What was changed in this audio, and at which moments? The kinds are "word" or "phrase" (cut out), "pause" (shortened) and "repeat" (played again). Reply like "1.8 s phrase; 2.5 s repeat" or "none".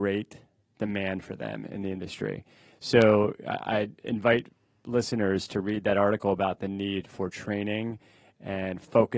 none